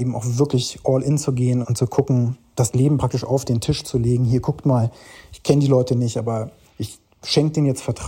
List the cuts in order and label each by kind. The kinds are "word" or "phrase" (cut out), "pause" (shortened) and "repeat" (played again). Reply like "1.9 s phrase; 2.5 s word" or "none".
1.6 s word

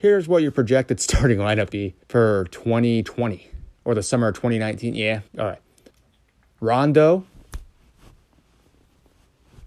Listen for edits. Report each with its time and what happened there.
1.7 s word; 2.0 s pause; 3.8 s pause; 5.3 s word; 5.9 s pause

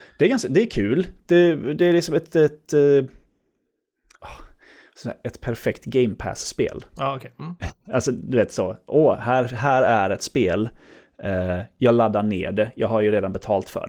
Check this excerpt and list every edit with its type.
none

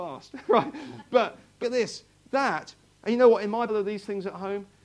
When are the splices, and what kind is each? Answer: 1.6 s word; 3.7 s word

